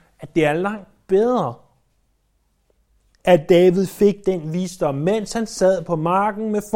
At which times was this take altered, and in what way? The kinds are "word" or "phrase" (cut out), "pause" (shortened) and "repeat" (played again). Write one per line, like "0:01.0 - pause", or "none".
none